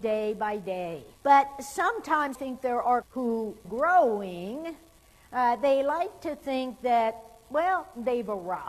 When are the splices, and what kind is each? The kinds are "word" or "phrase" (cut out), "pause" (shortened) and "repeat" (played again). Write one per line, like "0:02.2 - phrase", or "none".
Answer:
0:01.1 - pause
0:02.3 - word
0:03.0 - word
0:03.6 - phrase